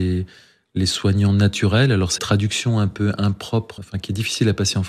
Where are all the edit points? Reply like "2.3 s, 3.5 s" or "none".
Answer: 2.2 s, 3.8 s